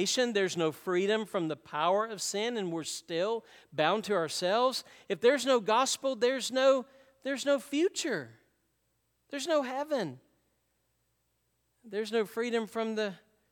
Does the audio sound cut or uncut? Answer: uncut